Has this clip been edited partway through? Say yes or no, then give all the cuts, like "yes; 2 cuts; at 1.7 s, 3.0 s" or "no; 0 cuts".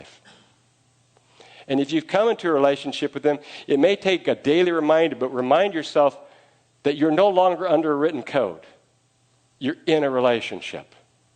no; 0 cuts